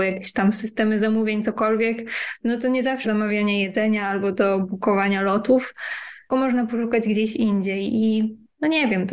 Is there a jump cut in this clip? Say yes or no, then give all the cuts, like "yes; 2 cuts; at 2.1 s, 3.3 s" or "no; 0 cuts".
yes; 2 cuts; at 3.0 s, 6.3 s